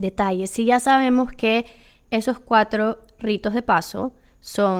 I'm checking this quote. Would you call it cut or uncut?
uncut